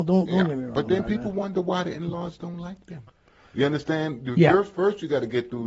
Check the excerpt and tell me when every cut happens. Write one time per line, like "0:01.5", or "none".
none